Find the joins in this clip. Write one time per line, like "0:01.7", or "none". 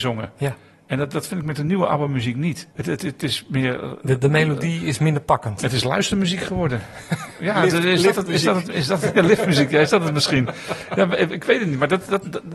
0:02.7